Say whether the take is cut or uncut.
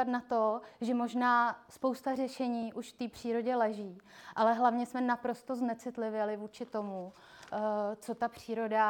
uncut